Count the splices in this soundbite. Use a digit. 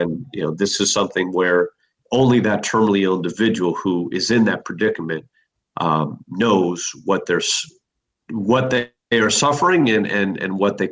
0